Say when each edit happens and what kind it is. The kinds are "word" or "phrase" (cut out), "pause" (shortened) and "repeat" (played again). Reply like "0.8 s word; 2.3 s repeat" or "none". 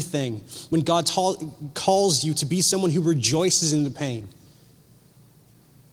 none